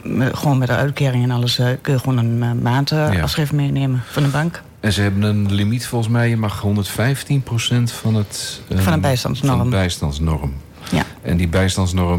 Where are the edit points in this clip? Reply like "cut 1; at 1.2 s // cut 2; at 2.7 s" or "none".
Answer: none

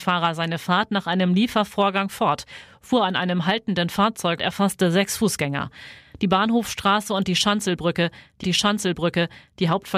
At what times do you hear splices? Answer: cut 1; at 4.4 s // cut 2; at 8.4 s

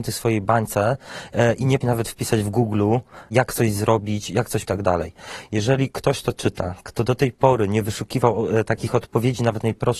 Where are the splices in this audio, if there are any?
cut 1; at 1.8 s // cut 2; at 4.6 s

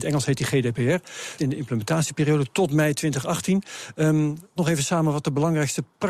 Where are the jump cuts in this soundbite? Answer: cut 1; at 1.4 s // cut 2; at 4.6 s

